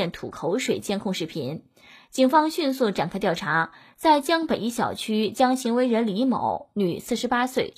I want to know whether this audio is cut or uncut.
uncut